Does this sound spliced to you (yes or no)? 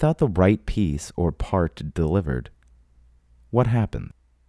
no